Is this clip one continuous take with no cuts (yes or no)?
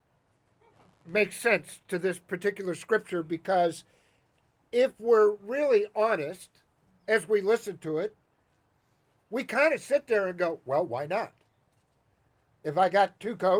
yes